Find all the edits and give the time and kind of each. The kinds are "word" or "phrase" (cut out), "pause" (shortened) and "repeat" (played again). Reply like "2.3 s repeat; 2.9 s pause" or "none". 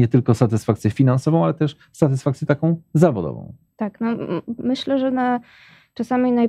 none

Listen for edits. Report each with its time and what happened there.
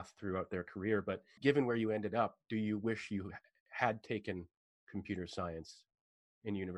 1.4 s word

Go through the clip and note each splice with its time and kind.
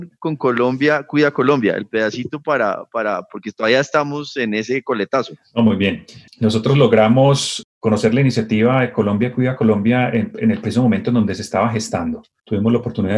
none

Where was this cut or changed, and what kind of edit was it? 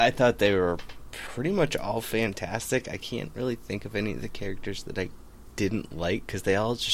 none

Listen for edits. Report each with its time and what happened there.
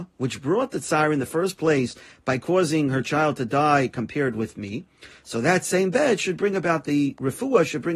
none

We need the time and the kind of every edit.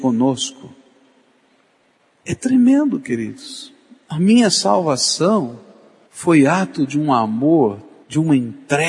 none

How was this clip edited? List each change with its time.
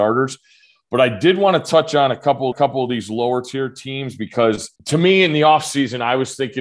2.5 s repeat; 4.8 s pause

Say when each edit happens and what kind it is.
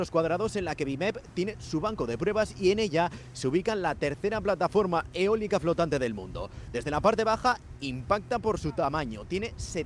none

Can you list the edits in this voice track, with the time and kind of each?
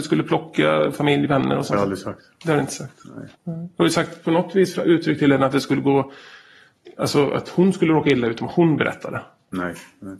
3.3 s pause

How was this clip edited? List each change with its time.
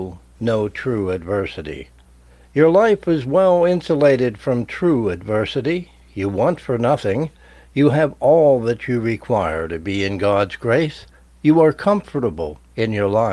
none

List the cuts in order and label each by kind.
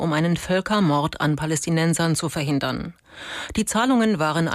none

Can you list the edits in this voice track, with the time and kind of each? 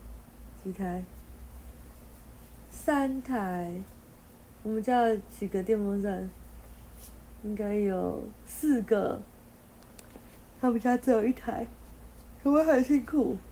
10.4 s pause

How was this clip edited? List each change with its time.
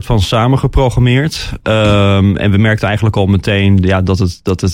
none

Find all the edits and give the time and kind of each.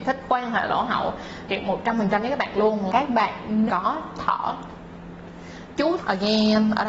1.5 s word; 2.9 s word; 3.7 s word; 4.1 s word; 6.0 s word

